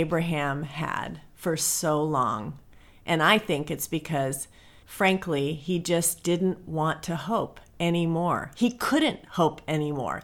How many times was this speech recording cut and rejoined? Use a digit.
0